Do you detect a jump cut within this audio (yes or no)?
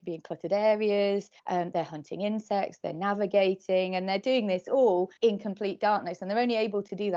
yes